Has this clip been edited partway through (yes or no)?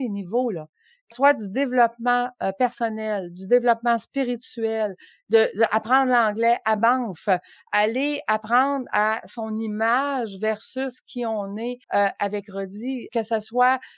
yes